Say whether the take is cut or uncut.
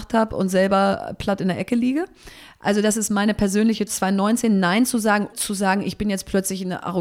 cut